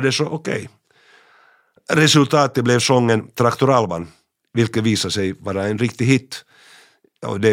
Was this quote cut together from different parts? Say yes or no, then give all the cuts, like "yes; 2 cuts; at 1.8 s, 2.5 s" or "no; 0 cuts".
no; 0 cuts